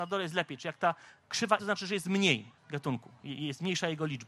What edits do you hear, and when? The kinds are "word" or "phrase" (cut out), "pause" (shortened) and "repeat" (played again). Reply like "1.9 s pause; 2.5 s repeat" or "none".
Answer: 1.6 s phrase; 2.6 s pause

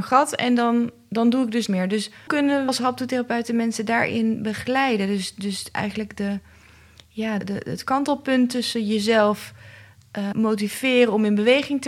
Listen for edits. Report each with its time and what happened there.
1.7 s word; 2.3 s word; 2.7 s word; 7.4 s word; 10.3 s word

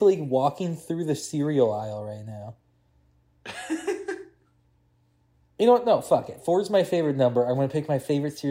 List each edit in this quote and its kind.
none

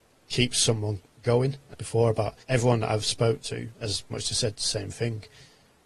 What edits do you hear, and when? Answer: 1.7 s phrase; 2.4 s pause; 4.1 s word

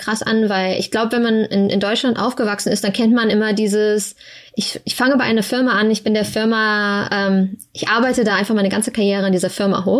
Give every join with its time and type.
none

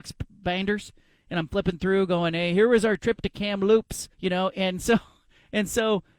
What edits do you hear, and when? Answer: 4.1 s pause

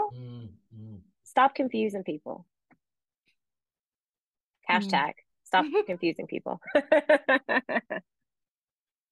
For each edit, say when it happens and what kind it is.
none

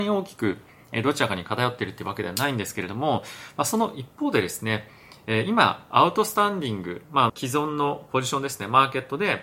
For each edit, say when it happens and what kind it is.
7.3 s word

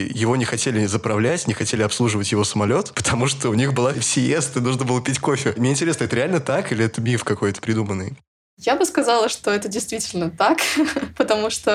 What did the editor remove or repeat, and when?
3.9 s word; 7.6 s word

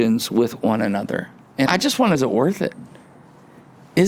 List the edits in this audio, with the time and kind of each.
1.7 s word; 2.1 s word

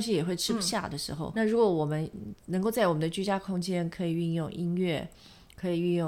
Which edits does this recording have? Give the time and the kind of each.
1.3 s word

